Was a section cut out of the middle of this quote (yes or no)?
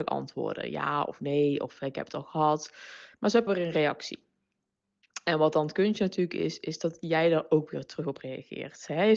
yes